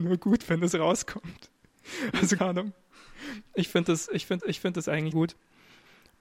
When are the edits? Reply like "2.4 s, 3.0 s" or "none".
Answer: 2.4 s, 4.4 s, 5.1 s